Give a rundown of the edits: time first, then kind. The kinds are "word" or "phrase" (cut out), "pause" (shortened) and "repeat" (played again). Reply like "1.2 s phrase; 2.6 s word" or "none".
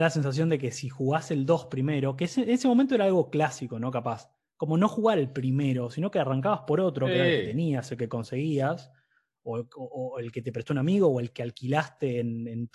none

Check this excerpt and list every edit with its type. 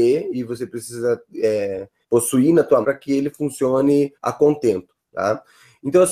2.0 s pause; 2.8 s word; 4.1 s pause

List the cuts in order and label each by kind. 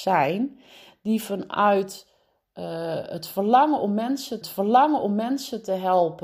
4.4 s repeat

